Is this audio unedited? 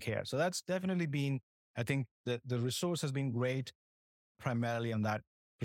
no; 2 cuts; at 1.5 s, 2.1 s

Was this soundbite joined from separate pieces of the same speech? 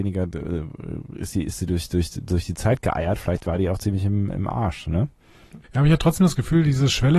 yes; 1 cut; at 5.6 s

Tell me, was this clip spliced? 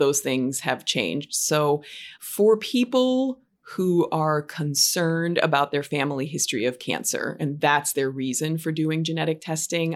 yes; 1 cut; at 2.1 s

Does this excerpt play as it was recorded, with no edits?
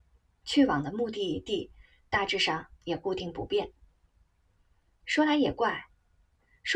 yes; 0 cuts

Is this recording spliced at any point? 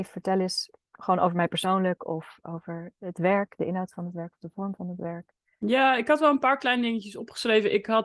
no; 0 cuts

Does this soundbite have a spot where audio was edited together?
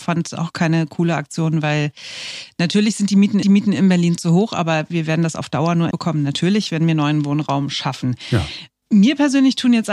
yes; 2 cuts; at 3.4 s, 5.9 s

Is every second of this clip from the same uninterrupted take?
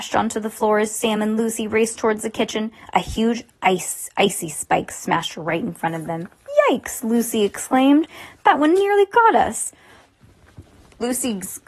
yes; 0 cuts

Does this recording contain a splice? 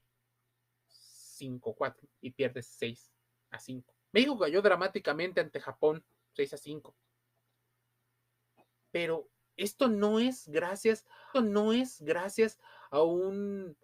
yes; 3 cuts; at 2.2 s, 4.0 s, 11.3 s

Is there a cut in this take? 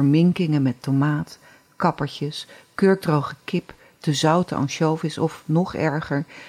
no; 0 cuts

